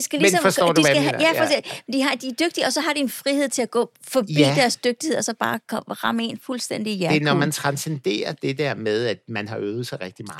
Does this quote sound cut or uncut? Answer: uncut